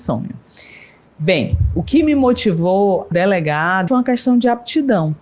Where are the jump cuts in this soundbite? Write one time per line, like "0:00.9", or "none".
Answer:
0:03.1
0:03.9